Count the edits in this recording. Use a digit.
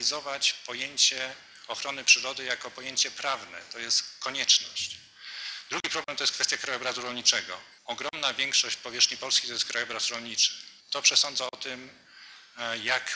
2